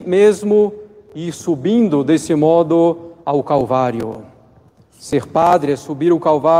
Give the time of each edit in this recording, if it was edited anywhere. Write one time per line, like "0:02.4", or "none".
0:03.2